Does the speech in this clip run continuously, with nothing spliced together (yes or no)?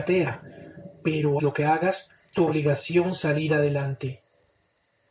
no